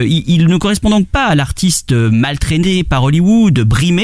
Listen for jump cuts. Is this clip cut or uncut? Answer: uncut